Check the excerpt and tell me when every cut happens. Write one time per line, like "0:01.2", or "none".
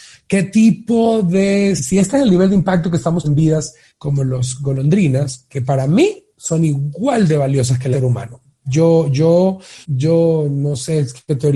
0:01.8
0:03.2
0:03.9
0:07.9
0:09.8